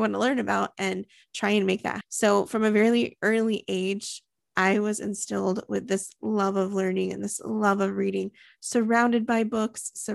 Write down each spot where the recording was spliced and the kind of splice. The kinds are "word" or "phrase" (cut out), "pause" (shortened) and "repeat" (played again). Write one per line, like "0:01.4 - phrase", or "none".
0:02.0 - word
0:03.2 - word